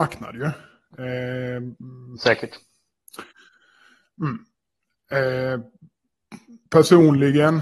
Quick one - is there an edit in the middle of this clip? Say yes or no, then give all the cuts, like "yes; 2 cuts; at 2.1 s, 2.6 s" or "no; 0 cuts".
yes; 1 cut; at 6.7 s